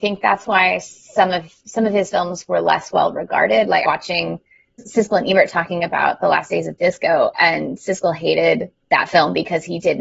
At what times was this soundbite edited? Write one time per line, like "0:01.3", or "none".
0:03.8